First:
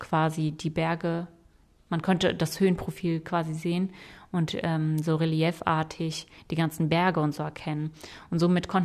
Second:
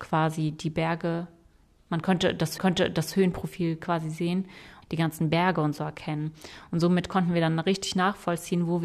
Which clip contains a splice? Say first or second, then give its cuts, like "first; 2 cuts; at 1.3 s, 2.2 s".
second; 2 cuts; at 2.6 s, 4.8 s